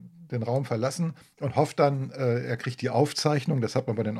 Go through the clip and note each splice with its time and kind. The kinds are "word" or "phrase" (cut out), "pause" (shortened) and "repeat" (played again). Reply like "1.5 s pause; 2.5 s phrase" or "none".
none

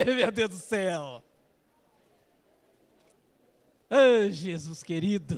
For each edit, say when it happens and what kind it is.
none

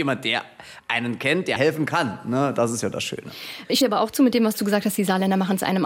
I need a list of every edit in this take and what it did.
1.6 s word; 3.8 s word

